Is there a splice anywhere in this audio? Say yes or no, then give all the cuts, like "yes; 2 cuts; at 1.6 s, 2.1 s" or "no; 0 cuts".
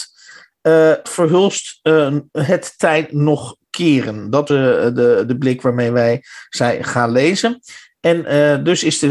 yes; 2 cuts; at 1.0 s, 4.5 s